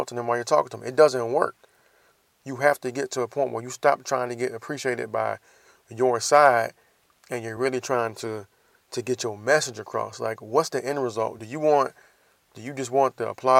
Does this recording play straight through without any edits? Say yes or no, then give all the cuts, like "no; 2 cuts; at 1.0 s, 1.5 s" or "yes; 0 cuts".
yes; 0 cuts